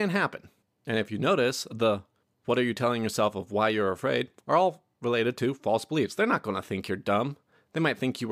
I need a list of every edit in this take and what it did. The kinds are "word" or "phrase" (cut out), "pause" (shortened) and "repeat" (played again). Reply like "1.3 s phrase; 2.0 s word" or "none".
none